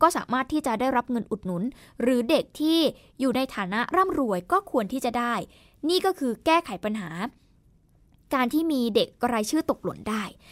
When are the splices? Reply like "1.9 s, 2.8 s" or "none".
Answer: none